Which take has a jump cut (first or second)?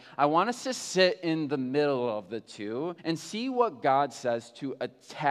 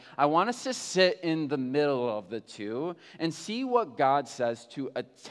first